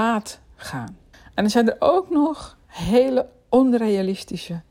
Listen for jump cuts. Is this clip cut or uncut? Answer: cut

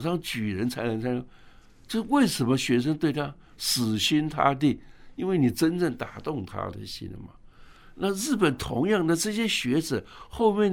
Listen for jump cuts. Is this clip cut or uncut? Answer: uncut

